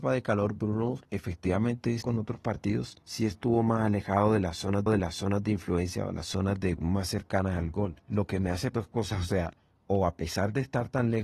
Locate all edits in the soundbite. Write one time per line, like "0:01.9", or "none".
0:02.0
0:03.0
0:04.9
0:08.0
0:08.7

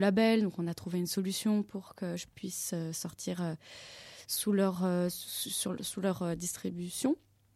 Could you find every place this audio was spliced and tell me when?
none

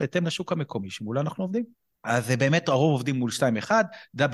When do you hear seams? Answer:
0:02.0

